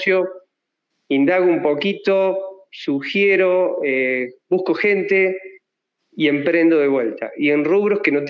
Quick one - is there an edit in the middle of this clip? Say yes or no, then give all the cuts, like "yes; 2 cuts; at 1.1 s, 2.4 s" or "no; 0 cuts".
no; 0 cuts